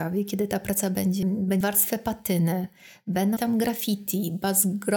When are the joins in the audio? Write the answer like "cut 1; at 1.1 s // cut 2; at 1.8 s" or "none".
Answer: cut 1; at 1.2 s // cut 2; at 1.6 s // cut 3; at 3.4 s